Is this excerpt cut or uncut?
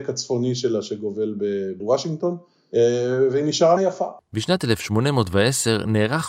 cut